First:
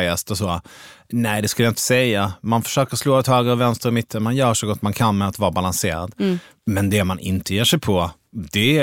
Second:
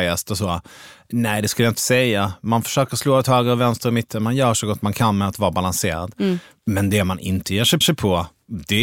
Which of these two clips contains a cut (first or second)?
second